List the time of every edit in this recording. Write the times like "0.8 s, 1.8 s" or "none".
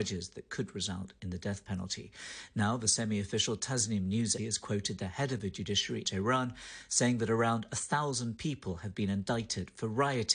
4.4 s, 6.0 s

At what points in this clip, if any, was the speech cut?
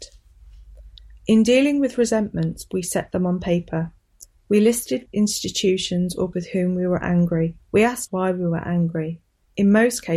5.1 s, 6.3 s, 7.6 s, 8.1 s

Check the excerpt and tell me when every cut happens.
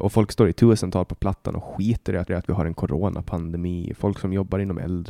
2.3 s

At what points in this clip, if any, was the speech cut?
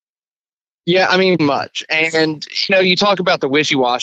1.4 s, 2.7 s

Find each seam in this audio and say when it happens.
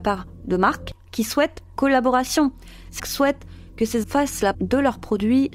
1.8 s, 3.0 s, 4.0 s, 4.5 s

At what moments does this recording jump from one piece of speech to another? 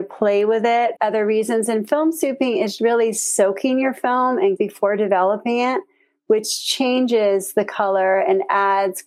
1.0 s, 2.8 s, 4.6 s

